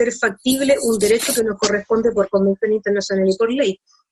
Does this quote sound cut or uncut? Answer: uncut